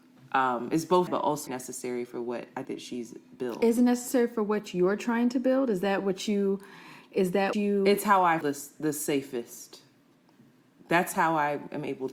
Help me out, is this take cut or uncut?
cut